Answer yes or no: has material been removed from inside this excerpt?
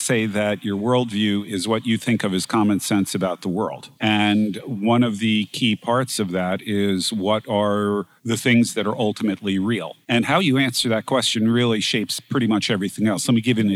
yes